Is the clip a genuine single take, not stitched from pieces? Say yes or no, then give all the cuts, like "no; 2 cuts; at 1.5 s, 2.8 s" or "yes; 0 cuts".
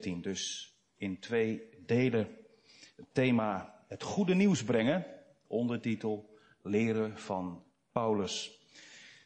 yes; 0 cuts